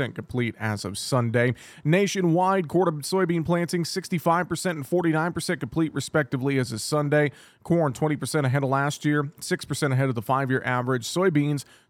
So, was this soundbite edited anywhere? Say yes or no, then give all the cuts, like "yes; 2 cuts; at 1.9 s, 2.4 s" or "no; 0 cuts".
no; 0 cuts